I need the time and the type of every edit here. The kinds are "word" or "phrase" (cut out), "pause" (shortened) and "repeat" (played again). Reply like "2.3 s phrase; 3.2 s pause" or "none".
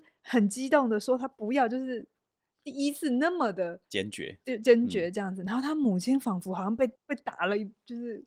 3.9 s pause; 7.0 s pause